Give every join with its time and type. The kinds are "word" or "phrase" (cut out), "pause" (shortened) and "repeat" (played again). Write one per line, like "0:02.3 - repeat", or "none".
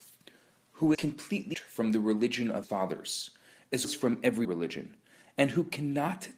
0:00.9 - word
0:01.5 - word
0:02.6 - word
0:03.8 - word
0:04.4 - word